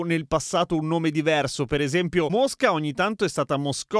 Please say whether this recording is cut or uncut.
uncut